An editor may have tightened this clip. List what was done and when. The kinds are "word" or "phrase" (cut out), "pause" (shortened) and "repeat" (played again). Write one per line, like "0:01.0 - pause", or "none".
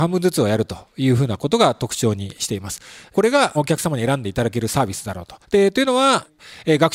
0:05.4 - pause